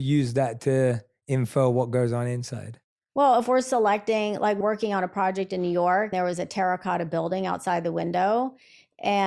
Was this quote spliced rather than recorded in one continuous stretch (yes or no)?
yes